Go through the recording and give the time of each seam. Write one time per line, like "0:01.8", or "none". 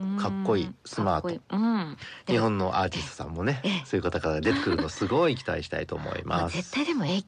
none